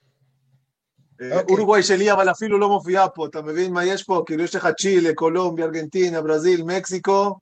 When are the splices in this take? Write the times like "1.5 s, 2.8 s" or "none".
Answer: none